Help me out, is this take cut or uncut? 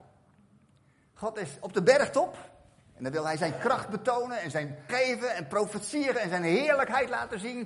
cut